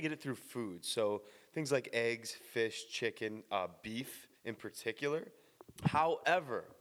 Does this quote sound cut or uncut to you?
cut